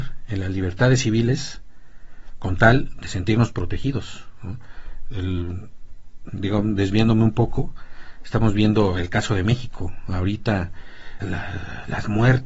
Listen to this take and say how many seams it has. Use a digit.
2